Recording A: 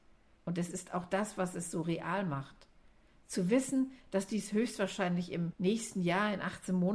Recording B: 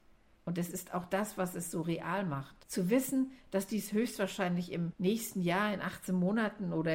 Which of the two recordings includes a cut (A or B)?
B